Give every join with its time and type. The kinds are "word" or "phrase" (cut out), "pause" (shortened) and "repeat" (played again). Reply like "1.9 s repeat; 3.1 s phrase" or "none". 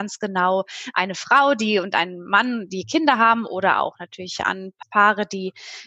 4.8 s word